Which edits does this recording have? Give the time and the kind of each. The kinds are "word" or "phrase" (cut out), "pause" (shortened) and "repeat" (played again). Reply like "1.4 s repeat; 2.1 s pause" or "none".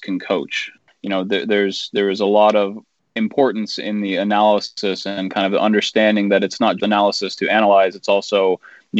6.8 s word

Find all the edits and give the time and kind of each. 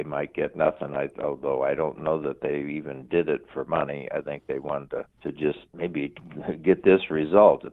5.1 s pause; 5.7 s pause

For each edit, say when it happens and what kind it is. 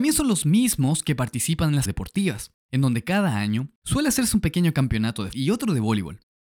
1.9 s word; 2.6 s pause; 3.8 s pause; 5.3 s word

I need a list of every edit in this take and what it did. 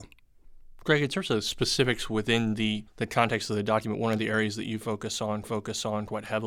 2.9 s pause; 5.4 s repeat

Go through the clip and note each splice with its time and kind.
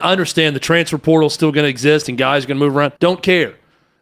3.0 s pause

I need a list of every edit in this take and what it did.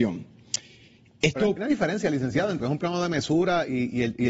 1.6 s word; 2.6 s word

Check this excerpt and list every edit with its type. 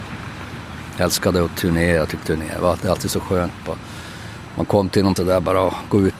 2.2 s phrase; 5.2 s word

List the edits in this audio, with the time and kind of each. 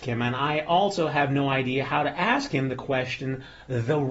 none

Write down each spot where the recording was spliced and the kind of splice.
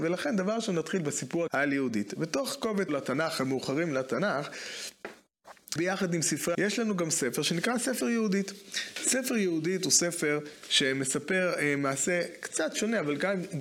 1.5 s word; 2.9 s phrase; 5.8 s word; 6.5 s word

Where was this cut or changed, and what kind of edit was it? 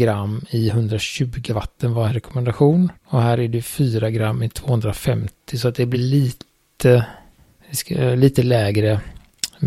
1.5 s word; 2.1 s word; 3.0 s pause; 5.9 s word

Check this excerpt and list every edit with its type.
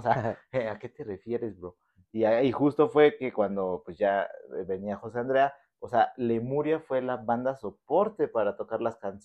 none

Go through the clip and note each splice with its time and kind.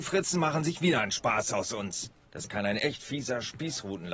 2.2 s pause

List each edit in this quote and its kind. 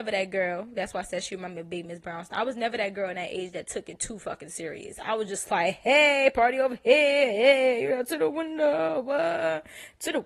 none

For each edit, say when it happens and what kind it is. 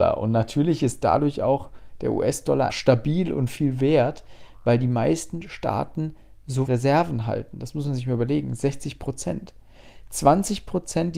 2.7 s word; 6.7 s word

